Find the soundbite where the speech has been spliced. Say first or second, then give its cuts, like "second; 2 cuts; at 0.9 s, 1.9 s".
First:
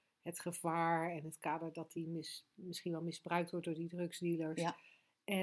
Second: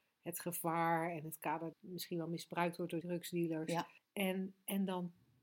second; 3 cuts; at 1.7 s, 3.0 s, 4.0 s